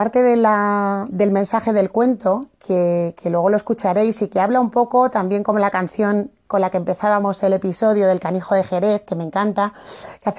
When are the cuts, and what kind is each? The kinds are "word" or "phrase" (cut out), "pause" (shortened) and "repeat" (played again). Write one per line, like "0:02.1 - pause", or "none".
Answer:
0:01.1 - word